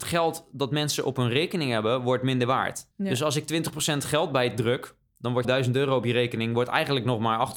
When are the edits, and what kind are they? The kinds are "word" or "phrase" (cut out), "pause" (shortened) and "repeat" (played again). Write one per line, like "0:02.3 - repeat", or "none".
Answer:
0:02.9 - pause
0:05.4 - word